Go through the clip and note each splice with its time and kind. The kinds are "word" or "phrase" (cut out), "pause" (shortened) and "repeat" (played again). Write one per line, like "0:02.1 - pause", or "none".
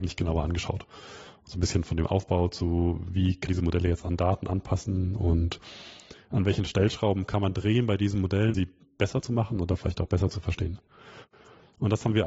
0:03.5 - word
0:08.5 - word